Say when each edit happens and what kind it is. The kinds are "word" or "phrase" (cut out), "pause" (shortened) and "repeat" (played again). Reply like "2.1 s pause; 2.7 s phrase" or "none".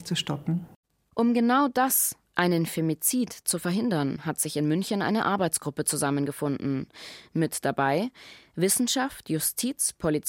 none